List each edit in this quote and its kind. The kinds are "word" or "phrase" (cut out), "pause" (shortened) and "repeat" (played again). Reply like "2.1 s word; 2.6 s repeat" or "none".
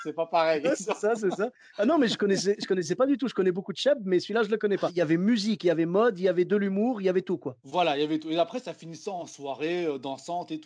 none